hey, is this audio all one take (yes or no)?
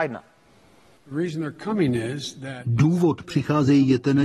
no